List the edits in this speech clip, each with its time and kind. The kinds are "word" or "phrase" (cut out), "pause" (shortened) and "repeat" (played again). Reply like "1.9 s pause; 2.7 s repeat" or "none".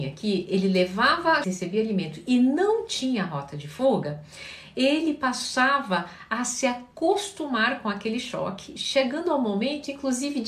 1.4 s phrase